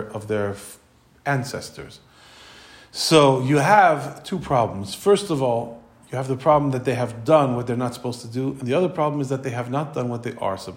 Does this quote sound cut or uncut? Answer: uncut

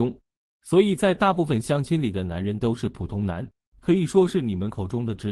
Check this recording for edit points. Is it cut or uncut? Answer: uncut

